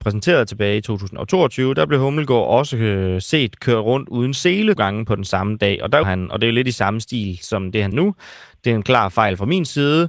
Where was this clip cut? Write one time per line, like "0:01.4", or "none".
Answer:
0:04.8
0:06.0
0:07.9

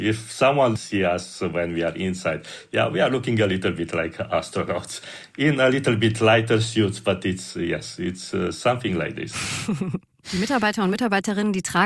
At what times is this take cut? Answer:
none

